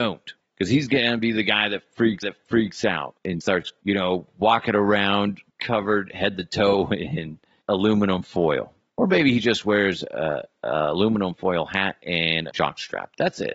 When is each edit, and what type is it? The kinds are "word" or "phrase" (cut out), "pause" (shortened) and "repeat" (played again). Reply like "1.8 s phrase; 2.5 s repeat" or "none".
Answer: 2.2 s repeat; 3.4 s word; 5.5 s pause; 12.5 s phrase